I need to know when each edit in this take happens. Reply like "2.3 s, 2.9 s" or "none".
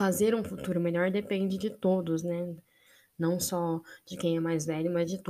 none